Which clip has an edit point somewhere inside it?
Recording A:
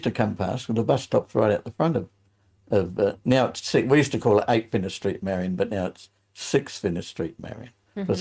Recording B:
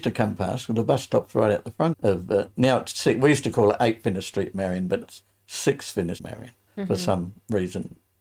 B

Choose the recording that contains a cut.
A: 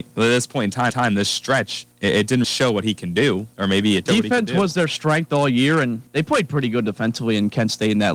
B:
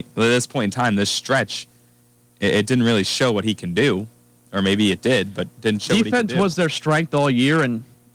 A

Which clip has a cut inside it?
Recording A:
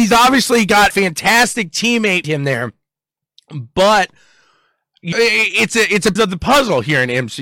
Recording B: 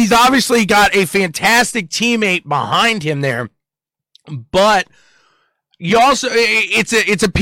A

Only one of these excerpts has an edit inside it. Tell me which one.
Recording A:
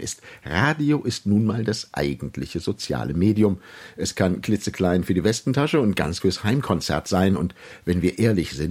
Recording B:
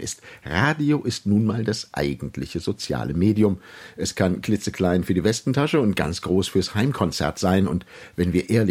A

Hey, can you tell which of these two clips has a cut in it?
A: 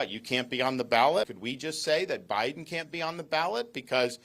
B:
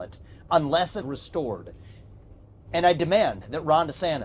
B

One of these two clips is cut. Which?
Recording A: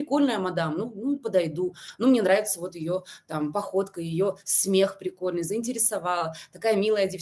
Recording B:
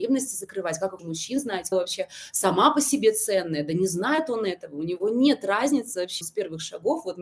B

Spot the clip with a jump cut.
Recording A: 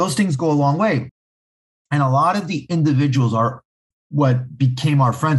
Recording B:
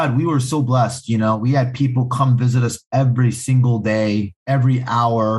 B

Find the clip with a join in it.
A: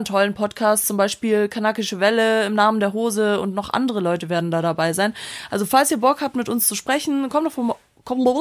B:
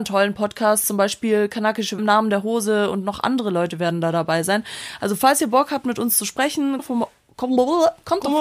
B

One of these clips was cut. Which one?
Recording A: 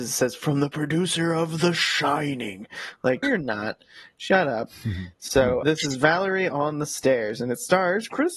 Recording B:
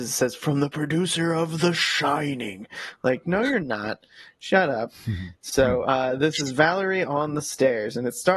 A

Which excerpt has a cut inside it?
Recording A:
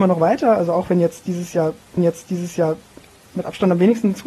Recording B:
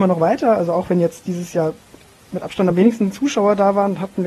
A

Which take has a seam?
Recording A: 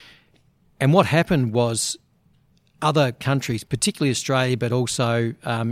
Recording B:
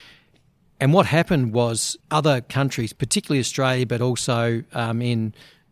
B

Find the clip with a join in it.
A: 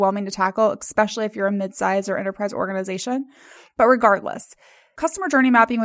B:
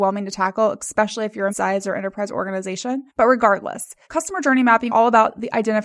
B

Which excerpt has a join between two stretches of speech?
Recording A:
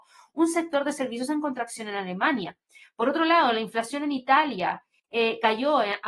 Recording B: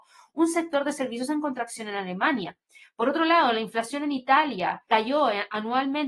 B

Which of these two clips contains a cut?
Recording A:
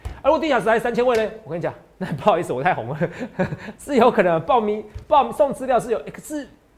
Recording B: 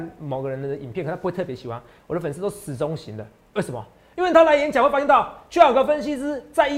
A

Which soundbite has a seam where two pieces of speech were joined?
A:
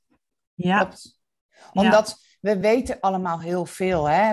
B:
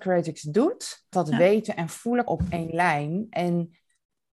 B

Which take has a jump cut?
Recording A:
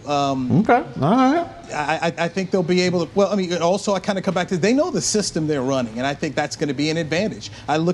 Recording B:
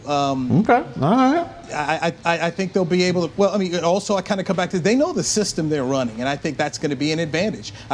A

